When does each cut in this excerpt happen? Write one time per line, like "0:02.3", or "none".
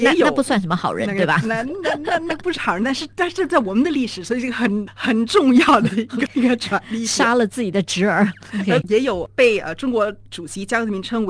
0:06.3
0:08.8